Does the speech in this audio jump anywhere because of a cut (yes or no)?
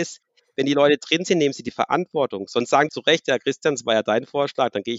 yes